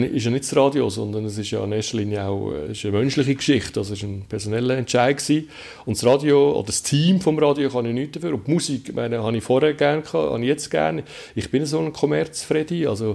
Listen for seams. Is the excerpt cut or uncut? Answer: uncut